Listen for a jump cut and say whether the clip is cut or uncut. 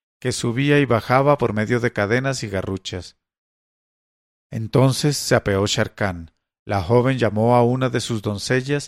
uncut